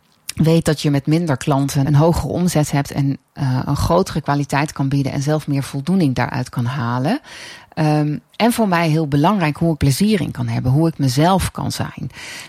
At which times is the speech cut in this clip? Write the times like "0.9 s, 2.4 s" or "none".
1.9 s, 9.8 s